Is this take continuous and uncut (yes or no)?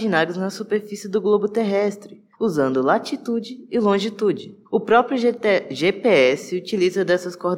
no